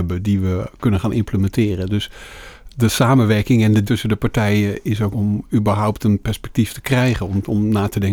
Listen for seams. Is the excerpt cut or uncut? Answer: cut